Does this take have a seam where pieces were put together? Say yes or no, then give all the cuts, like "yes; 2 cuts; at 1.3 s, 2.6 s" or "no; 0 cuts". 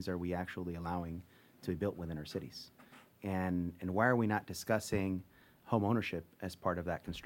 no; 0 cuts